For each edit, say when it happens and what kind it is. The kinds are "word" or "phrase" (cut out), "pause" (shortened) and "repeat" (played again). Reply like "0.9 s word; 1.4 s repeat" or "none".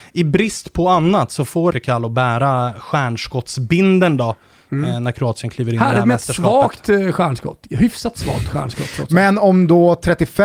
1.7 s phrase